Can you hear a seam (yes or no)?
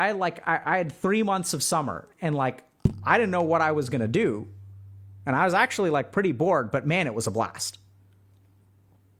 no